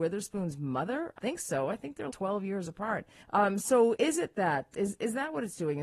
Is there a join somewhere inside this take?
yes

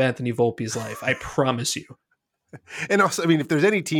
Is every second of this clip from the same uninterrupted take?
yes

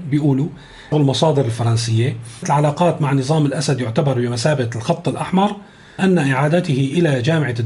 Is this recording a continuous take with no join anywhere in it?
no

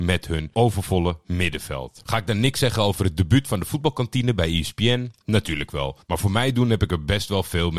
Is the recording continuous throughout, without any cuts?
no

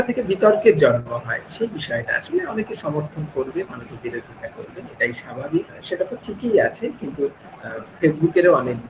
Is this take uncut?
yes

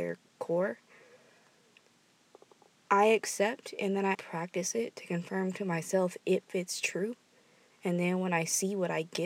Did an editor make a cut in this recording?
yes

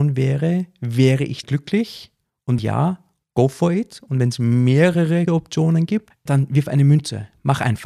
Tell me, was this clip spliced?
yes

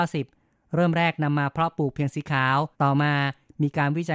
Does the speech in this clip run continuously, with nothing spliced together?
no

